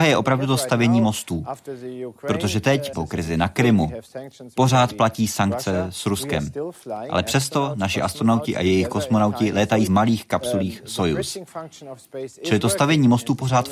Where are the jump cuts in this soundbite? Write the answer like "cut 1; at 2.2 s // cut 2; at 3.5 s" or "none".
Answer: cut 1; at 2.9 s // cut 2; at 9.9 s

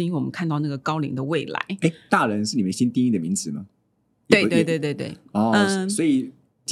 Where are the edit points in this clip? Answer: none

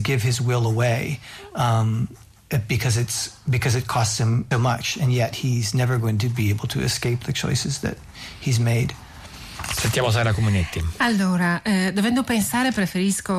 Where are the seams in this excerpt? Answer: cut 1; at 4.5 s // cut 2; at 7.2 s

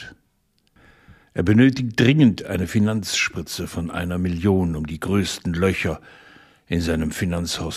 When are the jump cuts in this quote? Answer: none

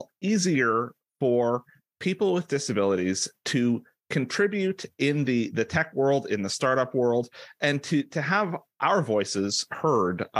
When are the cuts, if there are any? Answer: none

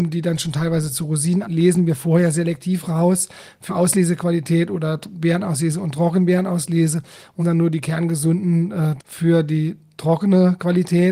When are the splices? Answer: cut 1; at 1.4 s // cut 2; at 3.7 s // cut 3; at 7.4 s // cut 4; at 9.0 s

